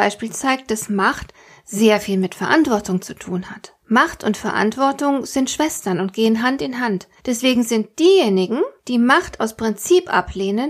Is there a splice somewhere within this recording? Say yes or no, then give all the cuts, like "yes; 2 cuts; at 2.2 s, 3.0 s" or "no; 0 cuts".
yes; 3 cuts; at 3.8 s, 7.2 s, 8.8 s